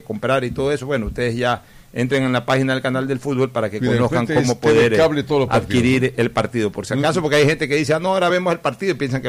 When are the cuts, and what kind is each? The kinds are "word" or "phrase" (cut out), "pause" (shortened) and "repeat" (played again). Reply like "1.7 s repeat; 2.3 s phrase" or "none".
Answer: none